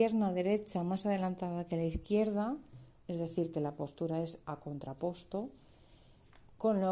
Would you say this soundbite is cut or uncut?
cut